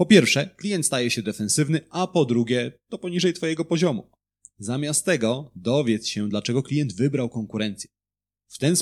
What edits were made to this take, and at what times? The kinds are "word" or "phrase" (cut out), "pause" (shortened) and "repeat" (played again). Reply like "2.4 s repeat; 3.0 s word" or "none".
none